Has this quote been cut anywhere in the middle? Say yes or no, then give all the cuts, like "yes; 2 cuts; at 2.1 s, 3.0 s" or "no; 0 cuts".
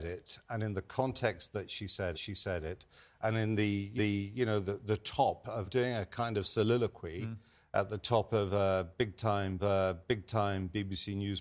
yes; 4 cuts; at 2.1 s, 4.0 s, 5.6 s, 9.6 s